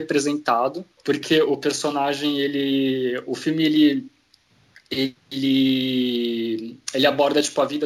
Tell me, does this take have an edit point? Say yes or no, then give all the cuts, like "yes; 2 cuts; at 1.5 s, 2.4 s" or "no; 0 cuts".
yes; 1 cut; at 0.9 s